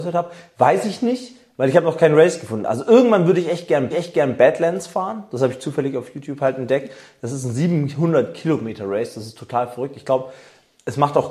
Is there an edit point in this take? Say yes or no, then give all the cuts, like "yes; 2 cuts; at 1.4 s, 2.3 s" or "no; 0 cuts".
yes; 1 cut; at 3.9 s